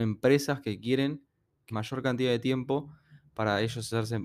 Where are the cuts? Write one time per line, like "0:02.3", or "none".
0:01.7

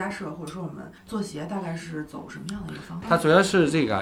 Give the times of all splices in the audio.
0:01.0

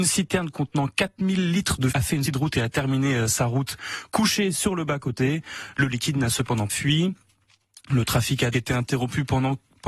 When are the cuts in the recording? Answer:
0:01.9
0:02.3
0:06.7
0:08.5

